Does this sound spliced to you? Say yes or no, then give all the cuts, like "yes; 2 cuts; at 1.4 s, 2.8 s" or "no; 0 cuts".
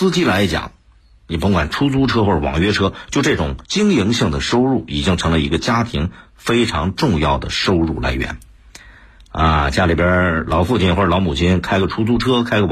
yes; 1 cut; at 3.6 s